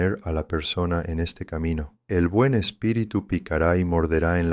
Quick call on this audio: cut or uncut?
cut